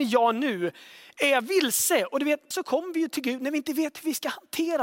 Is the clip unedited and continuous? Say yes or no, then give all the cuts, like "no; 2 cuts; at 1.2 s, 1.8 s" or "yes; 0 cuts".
no; 1 cut; at 2.5 s